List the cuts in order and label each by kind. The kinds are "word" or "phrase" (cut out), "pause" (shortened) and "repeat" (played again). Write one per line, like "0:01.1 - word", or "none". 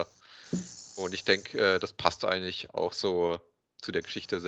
none